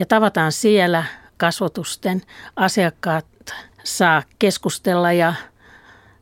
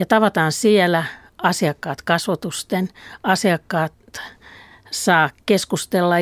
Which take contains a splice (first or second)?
first